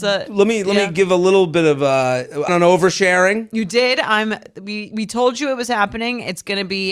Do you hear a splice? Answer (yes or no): yes